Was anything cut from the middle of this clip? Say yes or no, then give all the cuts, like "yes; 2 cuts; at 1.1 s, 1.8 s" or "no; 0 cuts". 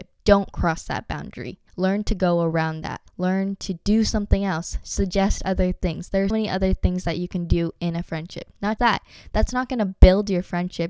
yes; 4 cuts; at 1.7 s, 3.1 s, 6.3 s, 8.8 s